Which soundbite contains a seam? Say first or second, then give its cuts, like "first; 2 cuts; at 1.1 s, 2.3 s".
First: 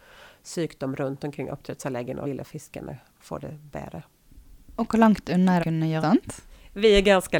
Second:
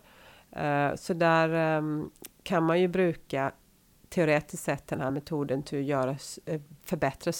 first; 3 cuts; at 2.2 s, 5.6 s, 6.0 s